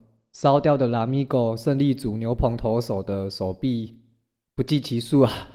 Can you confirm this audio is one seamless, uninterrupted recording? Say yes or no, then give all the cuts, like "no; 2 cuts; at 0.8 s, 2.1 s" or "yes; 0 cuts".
yes; 0 cuts